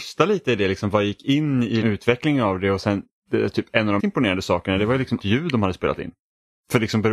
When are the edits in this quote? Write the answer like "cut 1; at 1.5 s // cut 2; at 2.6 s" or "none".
cut 1; at 1.8 s // cut 2; at 4.0 s // cut 3; at 5.2 s